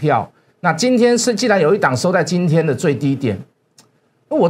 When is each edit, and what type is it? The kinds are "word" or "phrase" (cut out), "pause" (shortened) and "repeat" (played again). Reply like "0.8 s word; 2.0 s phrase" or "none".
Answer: none